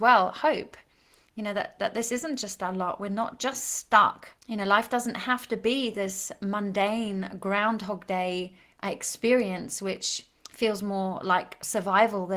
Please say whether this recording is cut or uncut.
cut